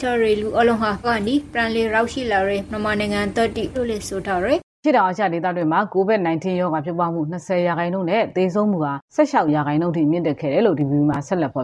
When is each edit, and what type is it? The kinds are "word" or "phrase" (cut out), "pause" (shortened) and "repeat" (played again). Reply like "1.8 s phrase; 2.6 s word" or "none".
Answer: 1.0 s word; 3.7 s word; 4.7 s pause